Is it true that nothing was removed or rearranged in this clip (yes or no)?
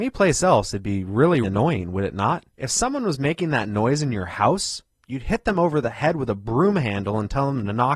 no